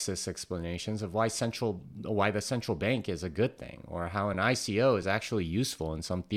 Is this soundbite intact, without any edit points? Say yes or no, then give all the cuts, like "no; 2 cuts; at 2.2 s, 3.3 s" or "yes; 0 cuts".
yes; 0 cuts